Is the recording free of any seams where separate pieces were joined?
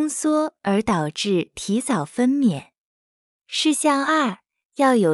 yes; 0 cuts

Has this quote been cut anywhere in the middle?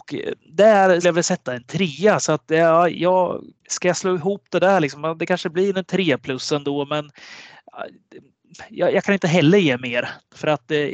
yes; 2 cuts; at 1.0 s, 3.6 s

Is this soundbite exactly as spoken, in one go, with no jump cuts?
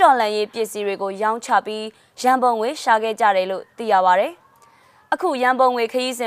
yes; 0 cuts

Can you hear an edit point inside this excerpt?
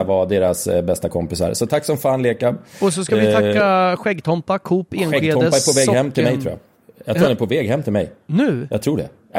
no; 0 cuts

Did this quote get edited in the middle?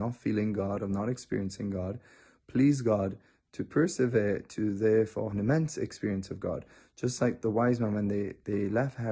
yes; 1 cut; at 5.3 s

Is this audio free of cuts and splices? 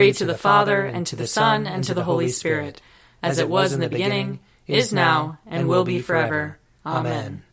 yes; 0 cuts

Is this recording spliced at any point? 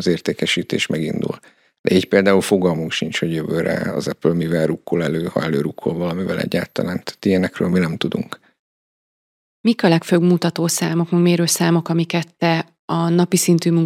no; 0 cuts

